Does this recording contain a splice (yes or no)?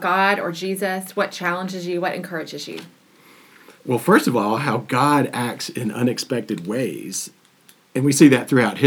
yes